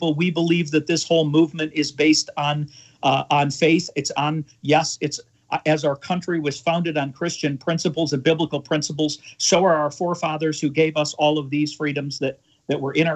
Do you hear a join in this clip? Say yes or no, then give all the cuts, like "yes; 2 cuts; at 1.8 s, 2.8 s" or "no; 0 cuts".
no; 0 cuts